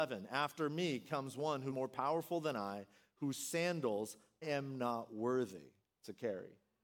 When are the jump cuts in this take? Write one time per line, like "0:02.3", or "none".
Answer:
0:01.7
0:04.4